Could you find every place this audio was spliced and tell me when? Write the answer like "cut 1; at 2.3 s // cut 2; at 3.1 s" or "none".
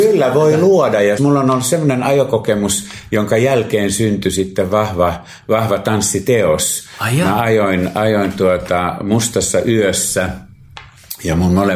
cut 1; at 1.2 s